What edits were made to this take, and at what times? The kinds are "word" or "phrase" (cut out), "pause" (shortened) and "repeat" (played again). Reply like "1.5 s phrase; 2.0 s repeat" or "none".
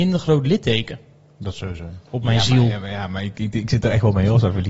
none